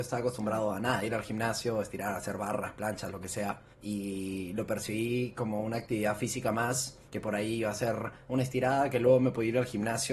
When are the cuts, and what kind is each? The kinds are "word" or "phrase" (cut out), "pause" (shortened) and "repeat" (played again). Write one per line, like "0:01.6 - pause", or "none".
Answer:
0:03.7 - pause
0:07.1 - pause

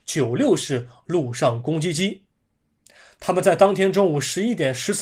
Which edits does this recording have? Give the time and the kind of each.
none

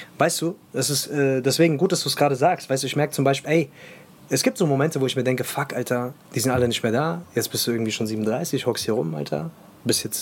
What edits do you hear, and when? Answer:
0:03.4 - word

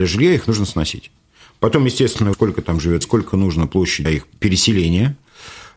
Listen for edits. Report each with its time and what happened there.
0:02.3 - word
0:03.0 - word
0:04.0 - word

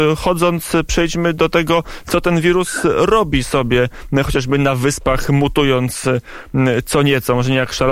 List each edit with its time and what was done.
none

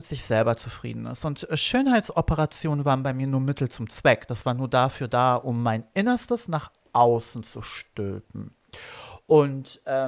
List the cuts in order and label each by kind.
none

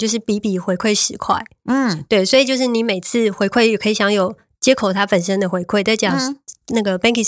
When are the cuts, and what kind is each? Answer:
none

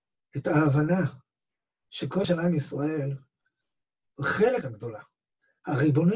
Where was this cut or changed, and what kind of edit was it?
0:02.2 - word
0:04.6 - word

